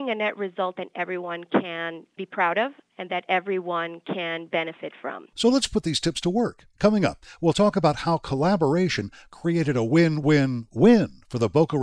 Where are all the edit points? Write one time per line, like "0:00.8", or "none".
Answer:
none

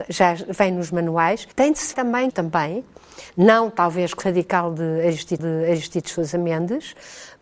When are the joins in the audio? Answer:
0:01.5
0:01.9
0:02.3
0:04.2
0:05.4

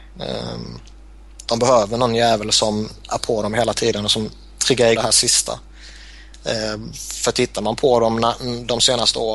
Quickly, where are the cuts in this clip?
0:04.9

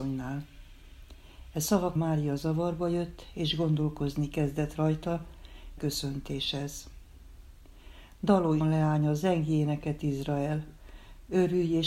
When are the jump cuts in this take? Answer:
0:02.0
0:05.8
0:08.6

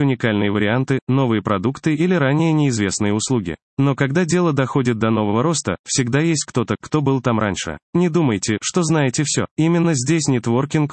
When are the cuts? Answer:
0:03.7
0:07.8
0:09.5

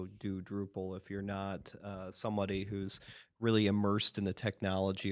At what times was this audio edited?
none

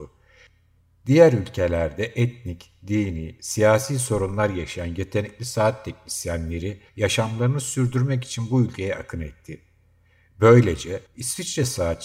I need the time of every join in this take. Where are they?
0:06.9
0:11.1

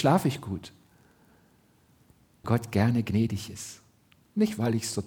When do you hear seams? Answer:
0:02.4

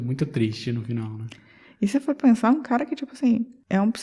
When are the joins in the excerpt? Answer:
none

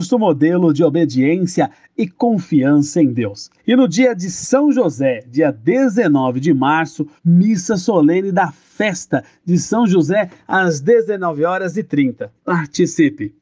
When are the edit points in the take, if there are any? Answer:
0:03.6
0:07.2
0:12.4

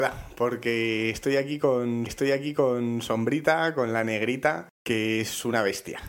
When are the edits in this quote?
0:02.1

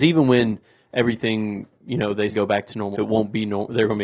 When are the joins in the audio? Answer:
0:02.3
0:02.9

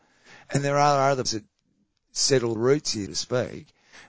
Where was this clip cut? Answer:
0:01.3
0:02.6
0:03.1

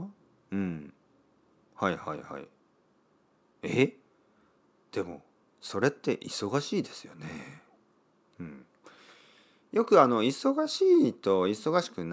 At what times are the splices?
none

